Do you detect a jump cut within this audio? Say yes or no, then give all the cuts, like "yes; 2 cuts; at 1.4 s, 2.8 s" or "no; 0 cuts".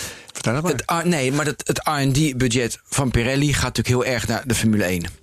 no; 0 cuts